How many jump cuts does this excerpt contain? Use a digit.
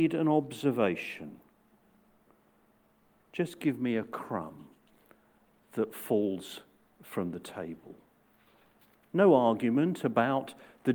0